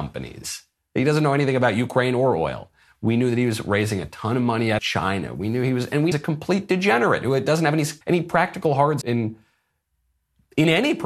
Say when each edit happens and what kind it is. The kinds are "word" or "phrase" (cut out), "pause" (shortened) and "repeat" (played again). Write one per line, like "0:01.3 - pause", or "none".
0:04.8 - word
0:06.1 - phrase
0:08.0 - pause
0:09.0 - phrase